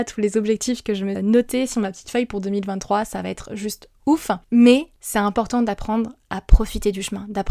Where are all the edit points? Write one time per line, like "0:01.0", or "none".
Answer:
0:01.1
0:04.4